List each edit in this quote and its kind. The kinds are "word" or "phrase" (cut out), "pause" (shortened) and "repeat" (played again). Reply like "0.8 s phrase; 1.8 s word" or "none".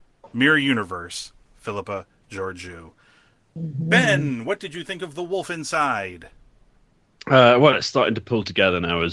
none